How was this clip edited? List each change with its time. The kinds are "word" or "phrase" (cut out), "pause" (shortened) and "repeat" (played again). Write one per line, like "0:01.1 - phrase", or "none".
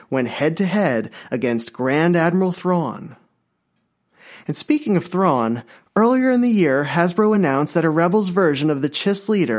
none